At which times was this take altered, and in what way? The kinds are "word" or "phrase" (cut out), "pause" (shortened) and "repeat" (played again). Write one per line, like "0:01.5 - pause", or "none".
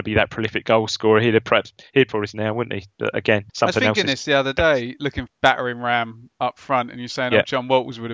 0:02.1 - phrase
0:03.5 - pause
0:05.3 - phrase